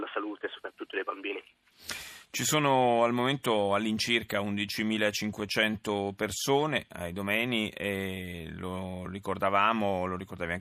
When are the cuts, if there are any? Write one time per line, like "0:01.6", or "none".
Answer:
none